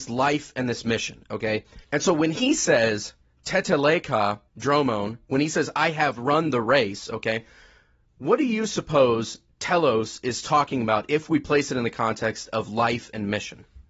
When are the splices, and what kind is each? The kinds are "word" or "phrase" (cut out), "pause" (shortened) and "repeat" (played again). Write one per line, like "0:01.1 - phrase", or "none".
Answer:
0:01.8 - pause
0:04.5 - pause